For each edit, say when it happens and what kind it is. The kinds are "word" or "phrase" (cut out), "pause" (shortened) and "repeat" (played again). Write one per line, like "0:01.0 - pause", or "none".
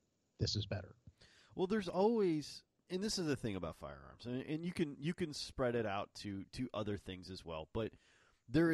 0:02.9 - word